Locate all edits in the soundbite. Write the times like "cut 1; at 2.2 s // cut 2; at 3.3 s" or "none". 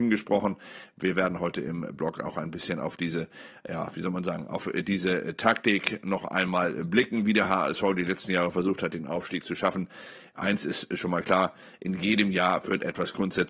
none